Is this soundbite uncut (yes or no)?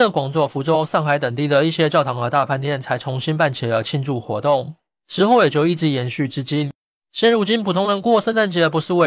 yes